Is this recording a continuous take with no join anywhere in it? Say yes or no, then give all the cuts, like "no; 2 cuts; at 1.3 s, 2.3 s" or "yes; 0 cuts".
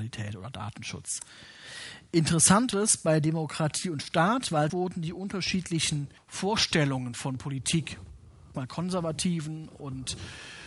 no; 4 cuts; at 2.7 s, 4.7 s, 6.2 s, 8.5 s